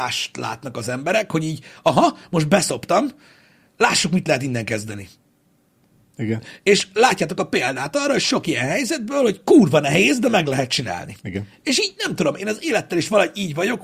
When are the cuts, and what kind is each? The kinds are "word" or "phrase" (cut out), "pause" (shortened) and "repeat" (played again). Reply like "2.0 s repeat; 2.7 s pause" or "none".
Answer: none